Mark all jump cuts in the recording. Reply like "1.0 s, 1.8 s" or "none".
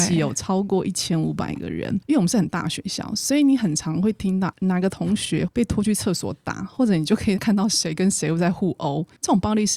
2.0 s